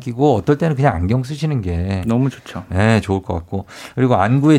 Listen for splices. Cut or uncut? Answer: uncut